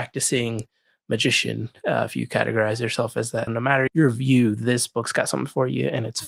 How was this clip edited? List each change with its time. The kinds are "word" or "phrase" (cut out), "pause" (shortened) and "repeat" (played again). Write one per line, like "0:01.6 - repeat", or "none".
0:03.5 - word
0:03.9 - word